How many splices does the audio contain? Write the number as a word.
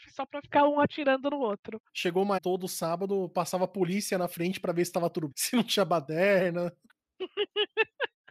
three